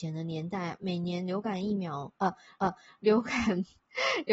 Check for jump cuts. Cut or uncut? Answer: cut